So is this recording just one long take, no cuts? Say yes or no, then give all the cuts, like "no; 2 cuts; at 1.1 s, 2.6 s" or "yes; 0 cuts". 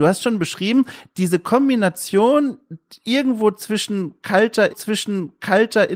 no; 1 cut; at 4.7 s